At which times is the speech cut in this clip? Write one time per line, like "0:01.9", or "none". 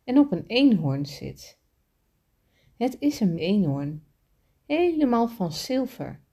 0:03.4